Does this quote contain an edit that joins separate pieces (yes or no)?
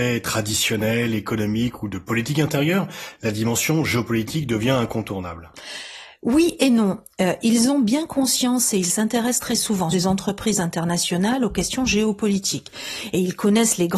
yes